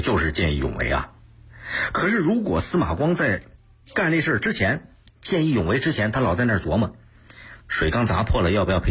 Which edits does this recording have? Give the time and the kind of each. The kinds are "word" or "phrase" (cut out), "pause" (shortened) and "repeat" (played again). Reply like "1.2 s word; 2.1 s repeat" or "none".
3.6 s pause; 5.1 s pause